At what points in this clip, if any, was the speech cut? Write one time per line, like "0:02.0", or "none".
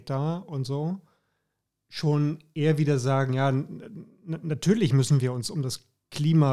none